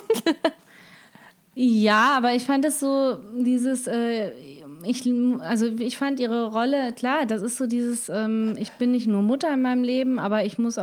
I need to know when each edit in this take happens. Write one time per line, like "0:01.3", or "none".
none